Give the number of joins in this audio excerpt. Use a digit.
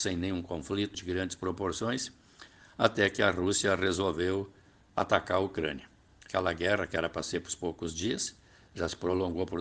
1